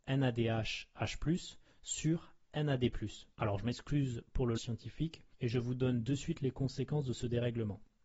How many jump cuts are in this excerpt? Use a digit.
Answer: 3